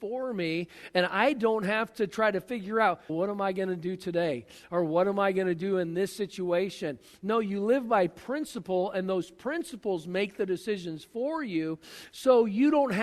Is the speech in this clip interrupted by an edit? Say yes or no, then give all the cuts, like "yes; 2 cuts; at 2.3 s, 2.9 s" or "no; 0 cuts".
yes; 1 cut; at 3.1 s